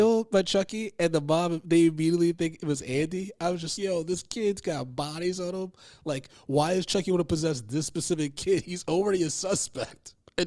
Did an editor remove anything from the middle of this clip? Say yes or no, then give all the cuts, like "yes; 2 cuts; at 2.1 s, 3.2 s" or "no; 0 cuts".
yes; 1 cut; at 3.8 s